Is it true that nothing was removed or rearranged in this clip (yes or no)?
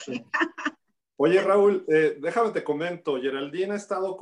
yes